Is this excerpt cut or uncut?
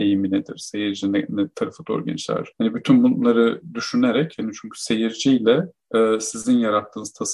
uncut